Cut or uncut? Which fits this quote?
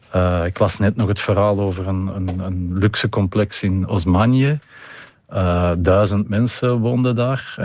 uncut